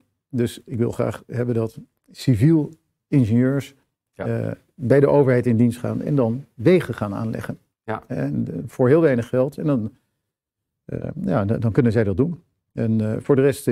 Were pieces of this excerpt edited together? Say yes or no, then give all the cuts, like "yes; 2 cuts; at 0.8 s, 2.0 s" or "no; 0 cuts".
no; 0 cuts